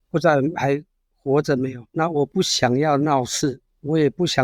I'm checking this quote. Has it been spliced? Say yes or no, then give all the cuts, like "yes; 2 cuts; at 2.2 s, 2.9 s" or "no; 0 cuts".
yes; 1 cut; at 1.9 s